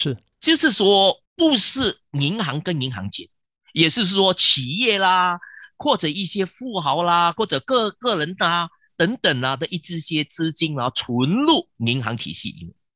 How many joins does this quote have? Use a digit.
1